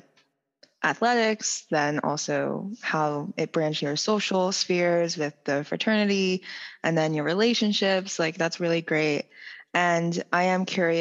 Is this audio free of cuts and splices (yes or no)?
no